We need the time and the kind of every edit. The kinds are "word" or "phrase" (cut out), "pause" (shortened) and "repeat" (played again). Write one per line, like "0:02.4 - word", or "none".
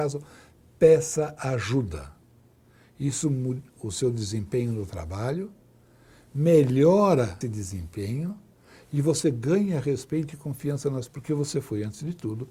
0:03.8 - word
0:07.4 - word
0:11.1 - word